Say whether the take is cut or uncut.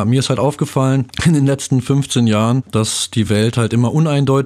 uncut